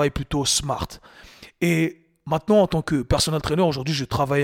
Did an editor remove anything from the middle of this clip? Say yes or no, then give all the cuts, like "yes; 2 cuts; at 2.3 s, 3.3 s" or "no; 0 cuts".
no; 0 cuts